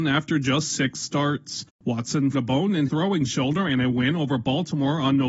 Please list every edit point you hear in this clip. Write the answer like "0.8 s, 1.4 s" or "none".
2.3 s, 2.9 s

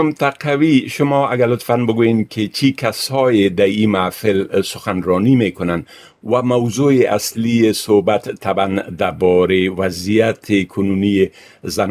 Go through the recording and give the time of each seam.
none

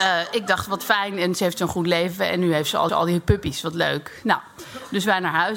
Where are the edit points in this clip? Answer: 2.9 s

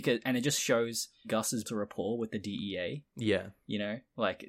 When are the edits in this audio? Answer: 1.2 s, 1.6 s, 3.1 s

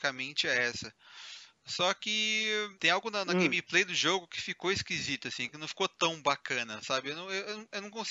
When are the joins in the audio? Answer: 2.8 s

